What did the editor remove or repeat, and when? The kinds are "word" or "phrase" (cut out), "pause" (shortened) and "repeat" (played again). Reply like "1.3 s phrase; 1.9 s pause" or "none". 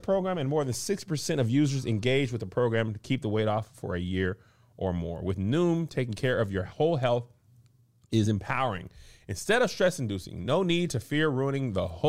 none